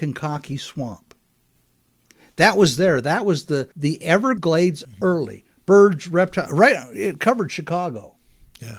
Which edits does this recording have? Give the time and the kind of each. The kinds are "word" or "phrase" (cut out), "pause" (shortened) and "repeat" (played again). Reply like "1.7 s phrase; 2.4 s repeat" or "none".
3.7 s pause; 4.8 s phrase